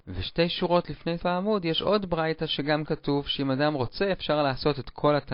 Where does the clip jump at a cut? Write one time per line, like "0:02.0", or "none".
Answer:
0:01.2
0:02.9